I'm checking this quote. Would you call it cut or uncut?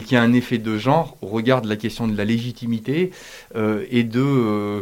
uncut